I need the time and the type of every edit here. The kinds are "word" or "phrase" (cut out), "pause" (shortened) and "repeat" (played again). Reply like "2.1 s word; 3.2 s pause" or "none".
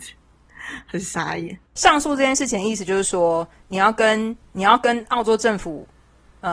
1.7 s pause; 4.4 s pause